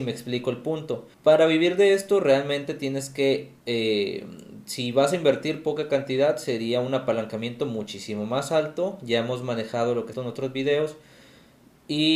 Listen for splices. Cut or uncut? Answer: cut